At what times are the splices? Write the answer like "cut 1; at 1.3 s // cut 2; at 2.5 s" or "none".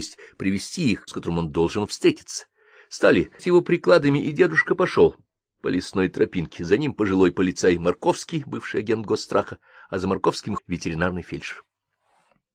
cut 1; at 1.1 s // cut 2; at 3.4 s // cut 3; at 10.6 s